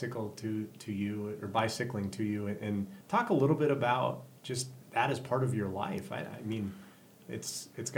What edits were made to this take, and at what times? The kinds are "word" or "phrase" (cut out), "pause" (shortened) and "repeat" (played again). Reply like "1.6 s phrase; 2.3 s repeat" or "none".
3.0 s pause; 4.8 s pause